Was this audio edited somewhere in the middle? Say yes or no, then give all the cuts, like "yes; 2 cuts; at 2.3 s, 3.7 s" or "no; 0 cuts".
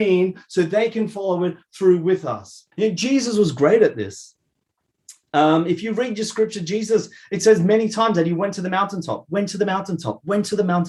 yes; 1 cut; at 2.7 s